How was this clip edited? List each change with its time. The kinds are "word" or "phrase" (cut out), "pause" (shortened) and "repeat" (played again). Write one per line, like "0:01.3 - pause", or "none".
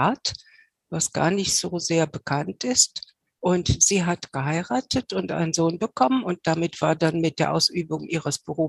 0:03.2 - pause